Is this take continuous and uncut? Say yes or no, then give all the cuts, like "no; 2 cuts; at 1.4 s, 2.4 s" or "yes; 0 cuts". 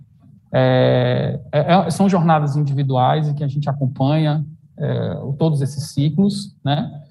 yes; 0 cuts